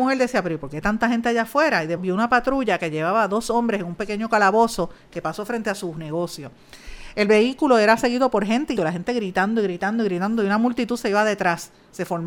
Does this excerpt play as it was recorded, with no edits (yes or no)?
no